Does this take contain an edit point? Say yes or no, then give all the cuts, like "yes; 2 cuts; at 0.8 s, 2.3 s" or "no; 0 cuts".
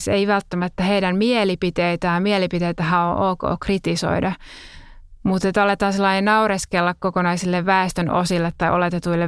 no; 0 cuts